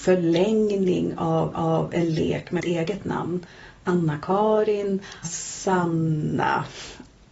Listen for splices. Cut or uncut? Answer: cut